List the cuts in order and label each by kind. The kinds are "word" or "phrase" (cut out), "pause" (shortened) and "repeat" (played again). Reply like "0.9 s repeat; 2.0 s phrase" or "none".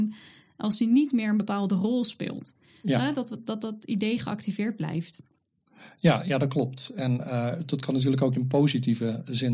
none